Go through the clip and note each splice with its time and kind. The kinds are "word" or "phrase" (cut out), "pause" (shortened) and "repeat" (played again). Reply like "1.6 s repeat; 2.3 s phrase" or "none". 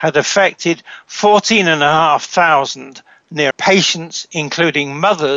3.5 s word

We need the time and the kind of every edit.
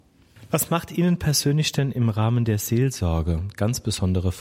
none

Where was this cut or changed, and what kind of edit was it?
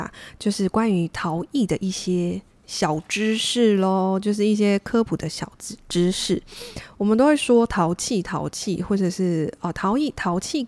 none

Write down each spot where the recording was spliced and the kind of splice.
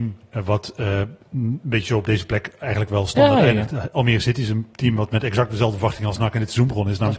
none

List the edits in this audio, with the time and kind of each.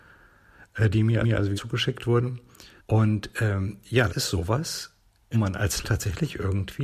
1.2 s repeat; 1.5 s word; 2.8 s pause; 4.1 s word; 5.3 s word; 5.8 s word

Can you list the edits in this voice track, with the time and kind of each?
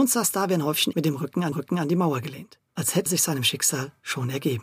0.9 s word; 1.5 s repeat; 2.7 s pause; 3.1 s word

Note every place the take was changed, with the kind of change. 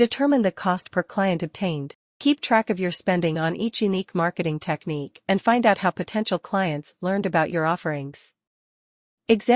none

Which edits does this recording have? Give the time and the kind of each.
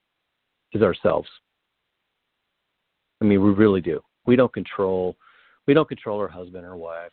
none

